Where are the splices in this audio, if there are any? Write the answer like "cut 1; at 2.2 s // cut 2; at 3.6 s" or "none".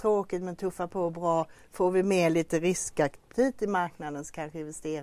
none